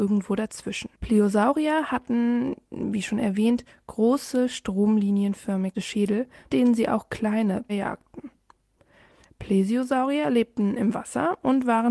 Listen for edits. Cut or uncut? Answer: cut